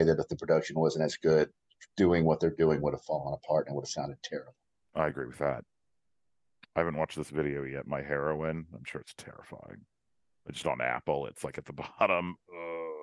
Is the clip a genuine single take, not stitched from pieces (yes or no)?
yes